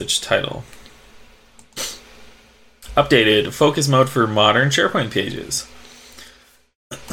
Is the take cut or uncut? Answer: uncut